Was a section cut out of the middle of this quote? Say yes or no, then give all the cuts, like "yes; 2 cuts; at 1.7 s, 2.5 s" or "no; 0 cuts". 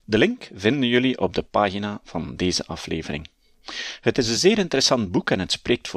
no; 0 cuts